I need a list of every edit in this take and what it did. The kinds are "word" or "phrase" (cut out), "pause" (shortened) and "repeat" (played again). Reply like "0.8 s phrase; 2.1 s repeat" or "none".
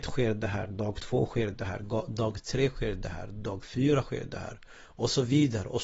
none

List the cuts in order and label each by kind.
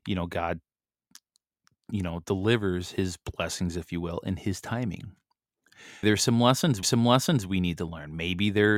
6.0 s word; 6.8 s repeat

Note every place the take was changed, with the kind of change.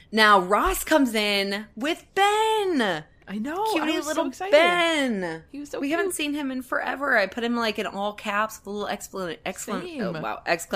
2.1 s pause

